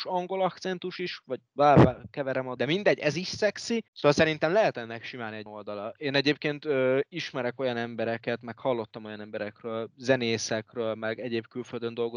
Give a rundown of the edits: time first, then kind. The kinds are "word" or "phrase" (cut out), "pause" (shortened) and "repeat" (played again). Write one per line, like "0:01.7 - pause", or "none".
0:02.6 - word
0:03.9 - pause
0:05.5 - word